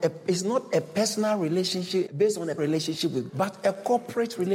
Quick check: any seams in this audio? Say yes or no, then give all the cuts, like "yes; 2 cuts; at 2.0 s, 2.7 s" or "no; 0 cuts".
yes; 3 cuts; at 2.1 s, 2.6 s, 3.3 s